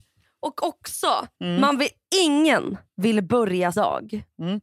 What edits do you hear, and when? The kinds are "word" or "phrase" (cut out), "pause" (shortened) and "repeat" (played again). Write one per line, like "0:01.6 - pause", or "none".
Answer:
0:01.3 - pause
0:02.9 - pause
0:03.7 - word